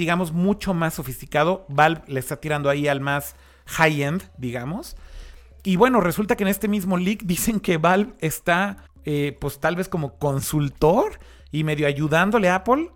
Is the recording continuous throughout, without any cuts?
no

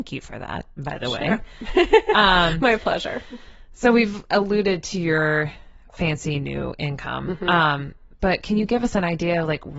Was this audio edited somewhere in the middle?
no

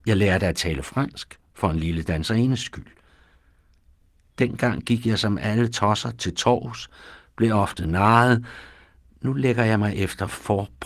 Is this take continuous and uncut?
yes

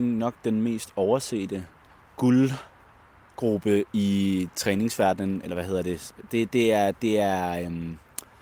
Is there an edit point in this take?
yes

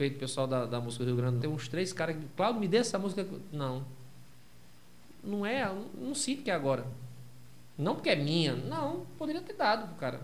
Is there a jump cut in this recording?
yes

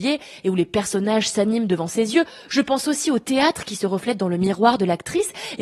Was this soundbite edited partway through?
no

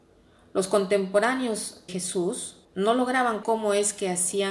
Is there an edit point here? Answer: yes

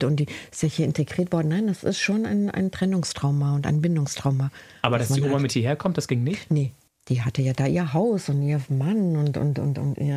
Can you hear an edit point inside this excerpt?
no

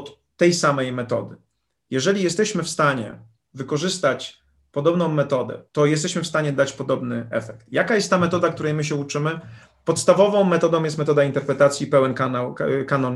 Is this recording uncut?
no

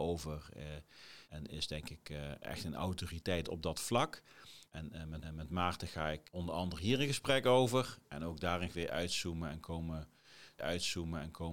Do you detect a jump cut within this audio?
yes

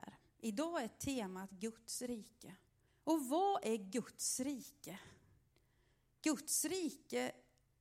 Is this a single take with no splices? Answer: no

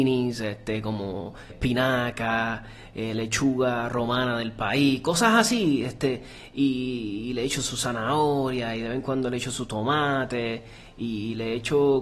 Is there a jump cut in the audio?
yes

